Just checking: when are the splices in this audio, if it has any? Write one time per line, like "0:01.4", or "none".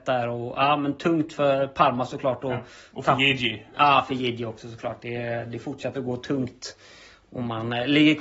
none